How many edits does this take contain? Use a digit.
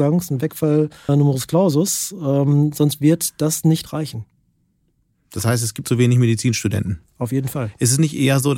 2